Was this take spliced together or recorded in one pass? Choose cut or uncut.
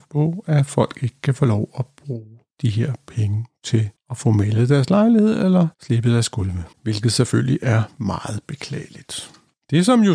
cut